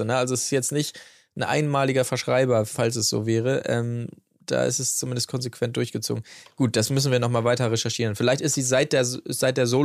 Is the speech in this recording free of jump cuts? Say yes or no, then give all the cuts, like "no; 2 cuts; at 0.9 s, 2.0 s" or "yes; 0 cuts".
yes; 0 cuts